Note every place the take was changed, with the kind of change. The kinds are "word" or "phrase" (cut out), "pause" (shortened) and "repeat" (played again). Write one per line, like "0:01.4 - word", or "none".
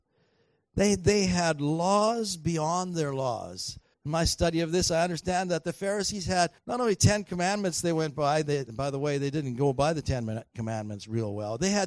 0:03.9 - pause
0:06.6 - pause